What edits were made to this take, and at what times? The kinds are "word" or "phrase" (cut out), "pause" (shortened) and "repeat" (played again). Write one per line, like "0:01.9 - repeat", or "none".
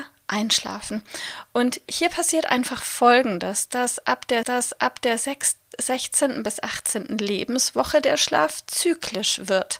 0:04.4 - repeat